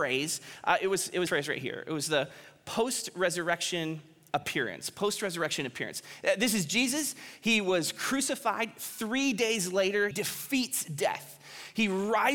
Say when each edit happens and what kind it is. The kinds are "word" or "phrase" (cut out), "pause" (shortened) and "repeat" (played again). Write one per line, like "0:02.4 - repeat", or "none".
0:01.3 - word
0:10.1 - word